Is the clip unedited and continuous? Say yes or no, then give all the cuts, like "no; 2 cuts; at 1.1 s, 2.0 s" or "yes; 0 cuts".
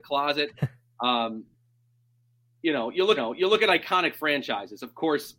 no; 1 cut; at 3.2 s